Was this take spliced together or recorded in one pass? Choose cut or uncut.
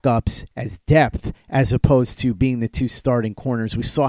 uncut